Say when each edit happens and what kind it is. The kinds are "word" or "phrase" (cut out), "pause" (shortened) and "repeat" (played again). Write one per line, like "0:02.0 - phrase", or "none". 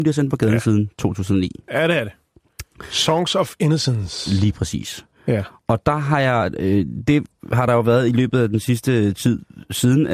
none